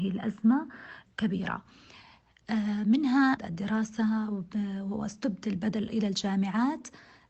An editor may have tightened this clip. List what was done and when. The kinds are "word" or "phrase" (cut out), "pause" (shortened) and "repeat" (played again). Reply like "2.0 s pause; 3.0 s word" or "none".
1.1 s word; 3.4 s word; 5.9 s word